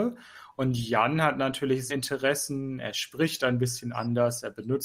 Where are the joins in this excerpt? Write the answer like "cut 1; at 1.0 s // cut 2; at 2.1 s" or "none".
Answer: cut 1; at 1.9 s